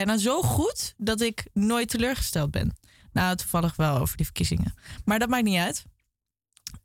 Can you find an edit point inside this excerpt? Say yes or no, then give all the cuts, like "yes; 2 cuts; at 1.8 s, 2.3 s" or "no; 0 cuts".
no; 0 cuts